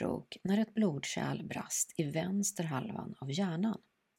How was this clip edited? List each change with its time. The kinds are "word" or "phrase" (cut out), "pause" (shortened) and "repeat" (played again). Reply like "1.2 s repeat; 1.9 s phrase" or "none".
none